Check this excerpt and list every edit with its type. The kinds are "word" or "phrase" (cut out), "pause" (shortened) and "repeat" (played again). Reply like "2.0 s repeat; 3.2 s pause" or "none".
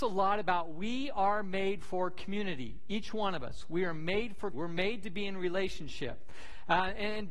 4.5 s word